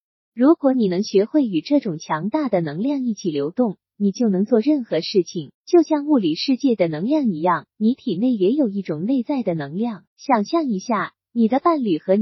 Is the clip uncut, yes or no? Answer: no